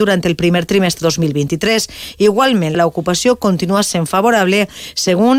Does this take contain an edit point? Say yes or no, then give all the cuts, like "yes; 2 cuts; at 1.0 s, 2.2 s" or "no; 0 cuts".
yes; 2 cuts; at 1.0 s, 2.7 s